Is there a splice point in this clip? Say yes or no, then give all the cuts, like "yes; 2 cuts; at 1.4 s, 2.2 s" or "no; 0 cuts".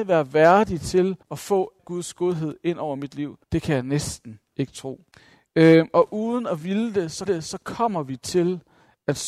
yes; 5 cuts; at 1.2 s, 1.8 s, 3.4 s, 5.1 s, 7.3 s